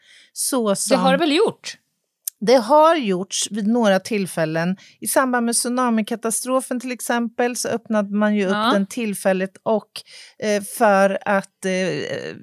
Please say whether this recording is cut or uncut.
uncut